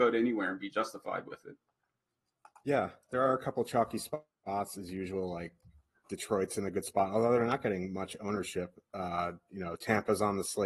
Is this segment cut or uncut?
uncut